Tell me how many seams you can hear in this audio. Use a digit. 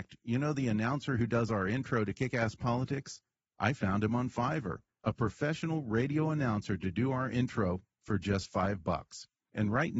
0